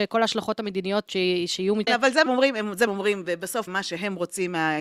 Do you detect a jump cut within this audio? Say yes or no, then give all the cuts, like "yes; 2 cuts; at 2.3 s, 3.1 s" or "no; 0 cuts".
yes; 5 cuts; at 1.1 s, 1.9 s, 2.3 s, 2.9 s, 3.7 s